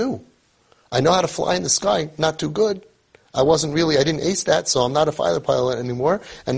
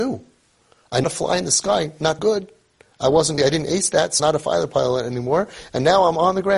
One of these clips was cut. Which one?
second; 4 cuts; at 1.0 s, 2.2 s, 3.4 s, 4.2 s

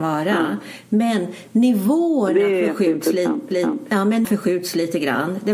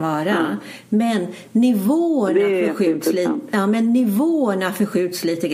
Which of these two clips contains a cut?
first; 2 cuts; at 3.5 s, 4.2 s

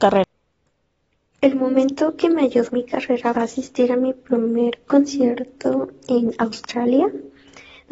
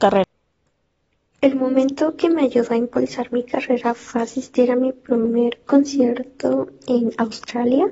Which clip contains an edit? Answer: first; 2 cuts; at 2.7 s, 3.4 s

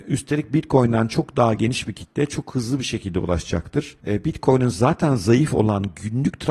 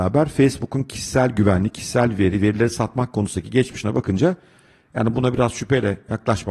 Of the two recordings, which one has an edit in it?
first; 1 cut; at 4.0 s

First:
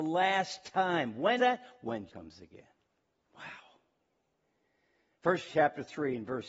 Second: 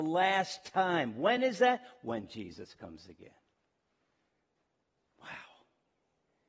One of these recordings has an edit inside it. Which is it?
first; 4 cuts; at 1.4 s, 2.1 s, 3.1 s, 5.5 s

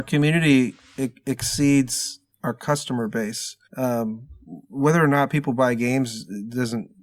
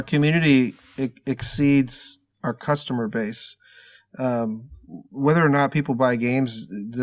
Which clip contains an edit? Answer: first; 1 cut; at 3.6 s

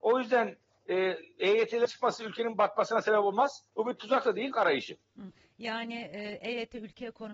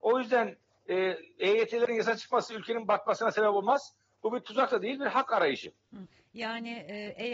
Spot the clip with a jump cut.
first; 3 cuts; at 1.9 s, 3.7 s, 4.5 s

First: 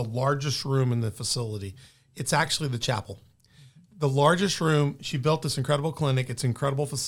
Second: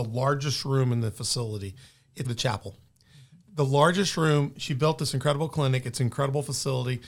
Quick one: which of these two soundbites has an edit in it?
second; 1 cut; at 2.2 s

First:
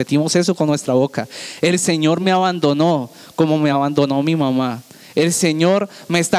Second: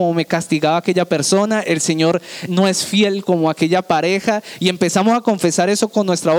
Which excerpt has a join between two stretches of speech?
second; 2 cuts; at 2.5 s, 3.2 s

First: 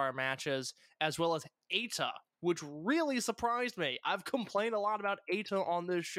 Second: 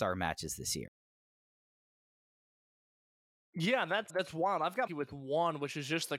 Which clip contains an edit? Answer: second; 2 cuts; at 4.1 s, 4.9 s

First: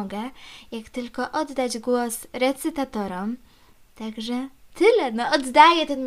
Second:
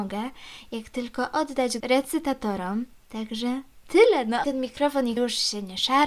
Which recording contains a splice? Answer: second; 4 cuts; at 1.8 s, 2.9 s, 4.4 s, 5.2 s

